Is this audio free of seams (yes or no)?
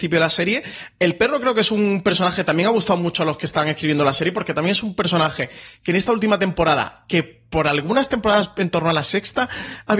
yes